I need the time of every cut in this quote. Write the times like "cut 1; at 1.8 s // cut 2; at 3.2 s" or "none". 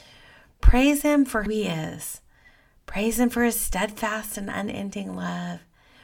cut 1; at 1.5 s